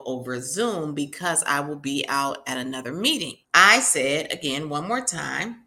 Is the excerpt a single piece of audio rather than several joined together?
no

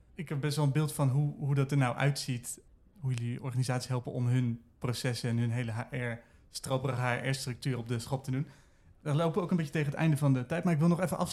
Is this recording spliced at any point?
no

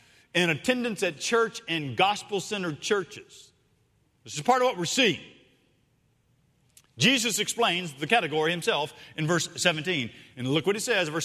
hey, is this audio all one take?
yes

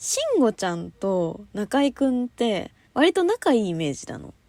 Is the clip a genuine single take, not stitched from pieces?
no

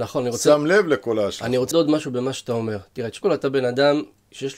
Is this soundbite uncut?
no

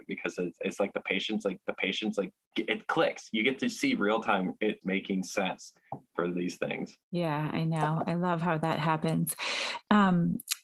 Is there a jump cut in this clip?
yes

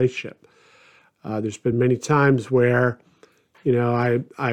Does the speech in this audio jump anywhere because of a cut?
no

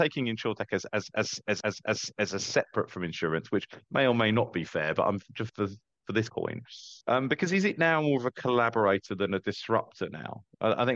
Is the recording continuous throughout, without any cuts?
no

